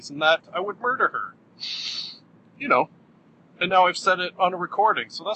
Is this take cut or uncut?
uncut